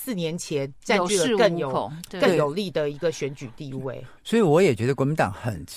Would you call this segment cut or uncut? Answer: cut